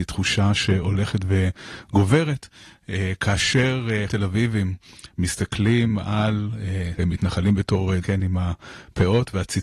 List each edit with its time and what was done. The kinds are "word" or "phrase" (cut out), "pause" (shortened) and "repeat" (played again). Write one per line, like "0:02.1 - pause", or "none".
0:04.1 - word
0:07.0 - word
0:08.0 - word